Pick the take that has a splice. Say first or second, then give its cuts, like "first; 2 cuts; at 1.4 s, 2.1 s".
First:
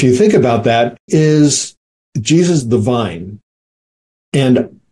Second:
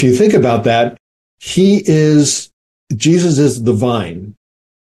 first; 2 cuts; at 1.1 s, 2.6 s